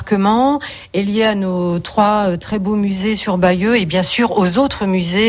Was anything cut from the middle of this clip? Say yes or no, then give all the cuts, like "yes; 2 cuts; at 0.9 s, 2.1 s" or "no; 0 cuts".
no; 0 cuts